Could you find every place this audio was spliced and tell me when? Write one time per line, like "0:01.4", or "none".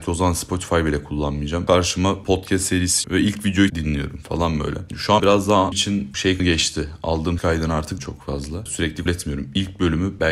0:02.2
0:03.0
0:03.7
0:05.2
0:05.7
0:06.4
0:07.4
0:08.0
0:09.1